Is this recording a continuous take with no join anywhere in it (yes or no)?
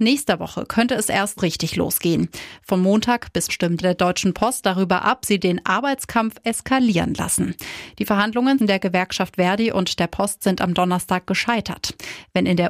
no